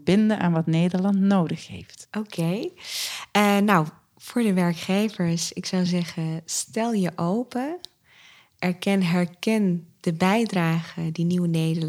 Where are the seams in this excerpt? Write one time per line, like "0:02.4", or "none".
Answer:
none